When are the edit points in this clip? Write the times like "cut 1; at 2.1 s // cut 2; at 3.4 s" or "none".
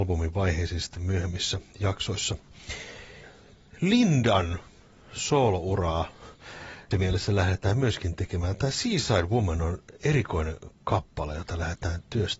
cut 1; at 6.9 s